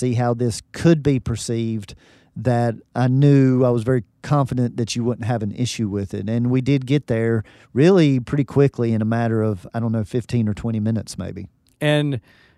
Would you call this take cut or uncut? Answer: uncut